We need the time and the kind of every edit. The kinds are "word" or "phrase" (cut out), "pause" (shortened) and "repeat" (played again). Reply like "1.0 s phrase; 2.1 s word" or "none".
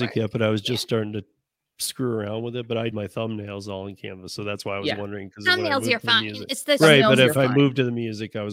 2.9 s word